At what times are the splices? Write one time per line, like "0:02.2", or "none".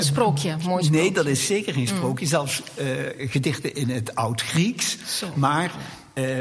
none